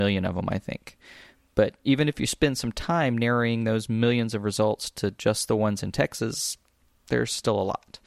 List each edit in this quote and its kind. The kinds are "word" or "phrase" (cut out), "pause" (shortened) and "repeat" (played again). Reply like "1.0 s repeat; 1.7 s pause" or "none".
none